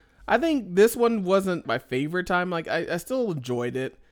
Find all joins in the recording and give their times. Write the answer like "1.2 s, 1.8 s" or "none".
1.6 s